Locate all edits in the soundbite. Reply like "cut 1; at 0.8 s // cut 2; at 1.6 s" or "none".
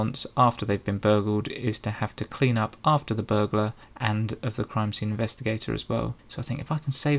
cut 1; at 3.8 s // cut 2; at 6.2 s